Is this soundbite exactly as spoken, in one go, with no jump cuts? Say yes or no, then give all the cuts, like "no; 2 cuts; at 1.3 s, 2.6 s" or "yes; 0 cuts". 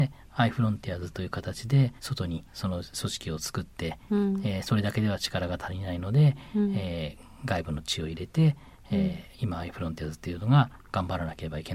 no; 4 cuts; at 2.0 s, 2.5 s, 2.9 s, 9.3 s